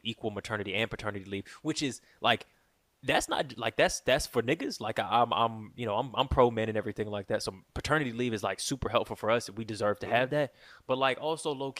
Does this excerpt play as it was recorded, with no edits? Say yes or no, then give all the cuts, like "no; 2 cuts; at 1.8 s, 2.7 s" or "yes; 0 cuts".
yes; 0 cuts